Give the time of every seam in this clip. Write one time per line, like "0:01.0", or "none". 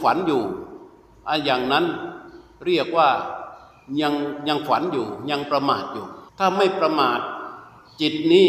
0:06.3

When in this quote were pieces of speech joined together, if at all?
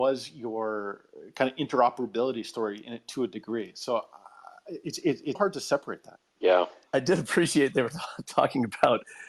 0:05.3

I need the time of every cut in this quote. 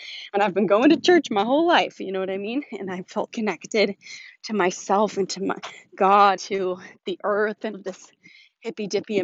0:03.3
0:05.9
0:06.4
0:07.7

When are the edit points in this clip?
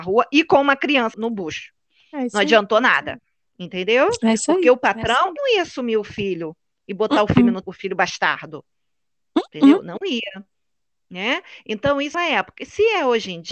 0:01.1
0:05.4
0:07.6
0:12.1

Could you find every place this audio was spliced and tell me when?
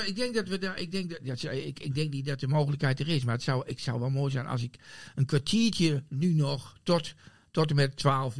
none

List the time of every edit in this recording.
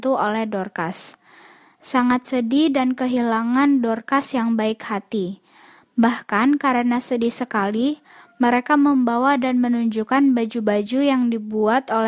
none

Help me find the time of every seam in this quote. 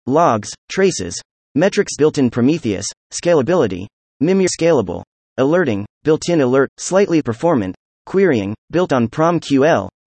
0:02.0
0:02.3
0:04.5
0:06.7
0:07.2
0:08.6

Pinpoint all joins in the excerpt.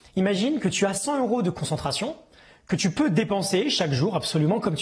none

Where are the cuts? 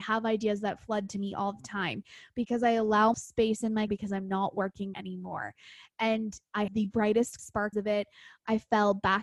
0:03.1
0:03.9
0:04.9
0:06.7
0:07.4
0:07.7

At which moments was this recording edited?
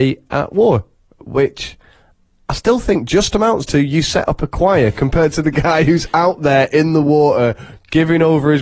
none

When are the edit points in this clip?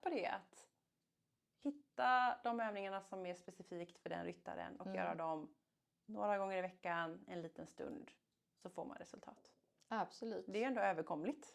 none

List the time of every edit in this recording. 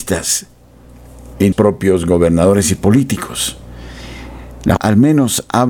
0:01.5
0:04.8

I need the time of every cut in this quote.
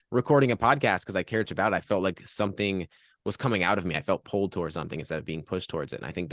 0:01.4

